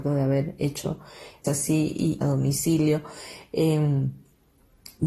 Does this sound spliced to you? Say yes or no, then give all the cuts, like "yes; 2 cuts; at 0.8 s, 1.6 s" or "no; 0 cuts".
yes; 2 cuts; at 1.4 s, 2.2 s